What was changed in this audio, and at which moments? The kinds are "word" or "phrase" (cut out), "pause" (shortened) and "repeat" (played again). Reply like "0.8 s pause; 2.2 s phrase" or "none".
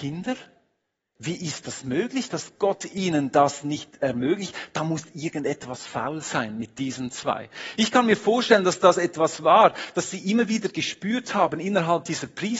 none